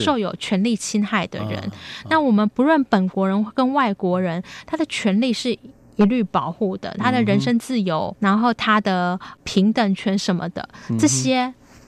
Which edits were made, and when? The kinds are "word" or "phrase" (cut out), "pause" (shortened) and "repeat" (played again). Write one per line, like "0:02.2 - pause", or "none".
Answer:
0:08.1 - word